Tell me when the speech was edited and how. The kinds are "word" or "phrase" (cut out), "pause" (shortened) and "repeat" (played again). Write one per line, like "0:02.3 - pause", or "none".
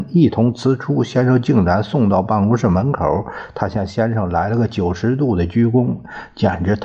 none